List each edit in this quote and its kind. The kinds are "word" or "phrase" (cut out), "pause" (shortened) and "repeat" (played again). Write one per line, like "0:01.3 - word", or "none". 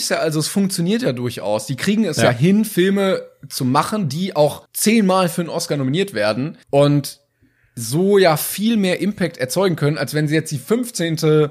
0:04.6 - pause
0:06.6 - pause